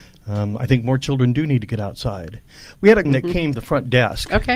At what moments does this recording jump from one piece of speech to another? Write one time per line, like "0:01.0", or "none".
0:03.0
0:03.5